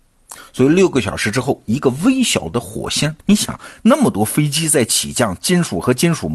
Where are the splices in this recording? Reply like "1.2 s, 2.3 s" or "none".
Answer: 3.2 s